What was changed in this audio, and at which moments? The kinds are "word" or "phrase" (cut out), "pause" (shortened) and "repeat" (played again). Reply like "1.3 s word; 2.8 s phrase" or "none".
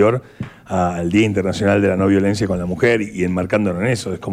none